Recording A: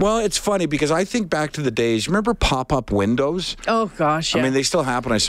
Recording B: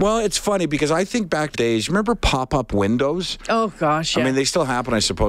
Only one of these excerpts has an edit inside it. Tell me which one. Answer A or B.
B